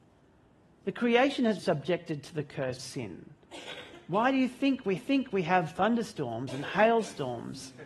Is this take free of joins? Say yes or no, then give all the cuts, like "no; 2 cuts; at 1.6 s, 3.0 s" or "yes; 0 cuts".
no; 3 cuts; at 1.6 s, 2.8 s, 5.0 s